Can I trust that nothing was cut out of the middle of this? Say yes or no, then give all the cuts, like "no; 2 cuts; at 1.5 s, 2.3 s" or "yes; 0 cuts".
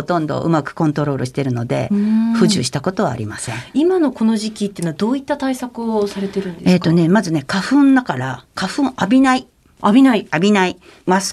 yes; 0 cuts